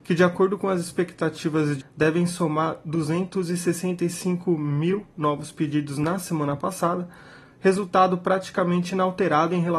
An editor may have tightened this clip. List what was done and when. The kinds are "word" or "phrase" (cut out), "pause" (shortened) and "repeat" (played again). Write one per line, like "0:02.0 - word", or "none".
0:01.8 - word